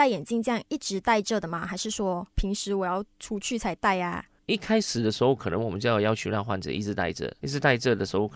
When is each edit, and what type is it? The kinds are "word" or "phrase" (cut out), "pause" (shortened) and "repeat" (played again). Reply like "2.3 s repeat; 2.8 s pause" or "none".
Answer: 7.4 s word